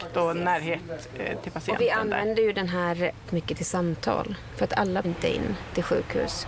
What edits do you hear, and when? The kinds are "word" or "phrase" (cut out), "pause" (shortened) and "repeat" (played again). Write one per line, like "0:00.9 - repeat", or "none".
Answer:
0:03.3 - phrase
0:05.0 - phrase